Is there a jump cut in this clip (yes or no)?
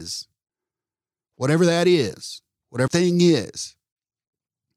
yes